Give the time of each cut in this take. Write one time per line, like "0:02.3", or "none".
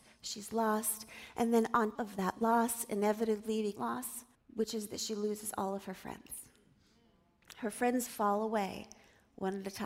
0:01.9
0:03.8
0:04.3
0:08.1